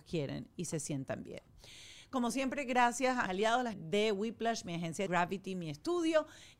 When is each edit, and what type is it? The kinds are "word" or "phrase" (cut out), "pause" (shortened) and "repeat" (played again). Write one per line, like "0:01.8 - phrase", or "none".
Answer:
0:03.3 - word
0:03.7 - word
0:05.1 - word